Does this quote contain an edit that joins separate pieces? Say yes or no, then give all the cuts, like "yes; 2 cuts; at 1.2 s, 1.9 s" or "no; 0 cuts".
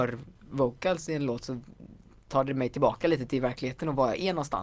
no; 0 cuts